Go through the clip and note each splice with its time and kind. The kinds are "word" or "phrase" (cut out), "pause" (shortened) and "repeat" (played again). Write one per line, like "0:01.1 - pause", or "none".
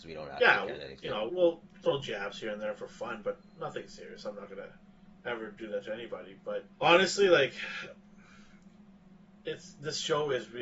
0:01.3 - word
0:06.7 - pause